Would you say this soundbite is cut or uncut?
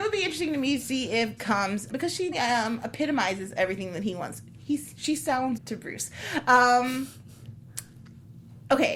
cut